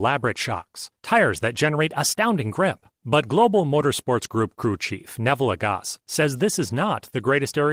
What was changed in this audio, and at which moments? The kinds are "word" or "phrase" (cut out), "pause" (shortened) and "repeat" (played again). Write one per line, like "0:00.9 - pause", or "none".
0:01.0 - pause
0:02.9 - pause